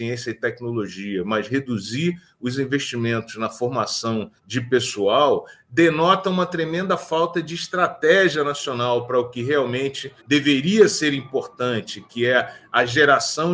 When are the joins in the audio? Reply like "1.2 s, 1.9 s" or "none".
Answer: 4.4 s, 10.2 s